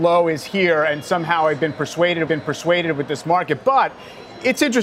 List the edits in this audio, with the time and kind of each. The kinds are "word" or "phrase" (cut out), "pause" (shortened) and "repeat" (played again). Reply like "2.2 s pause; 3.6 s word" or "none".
2.3 s repeat